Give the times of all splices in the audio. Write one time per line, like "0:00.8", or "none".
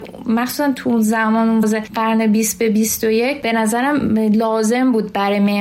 0:01.6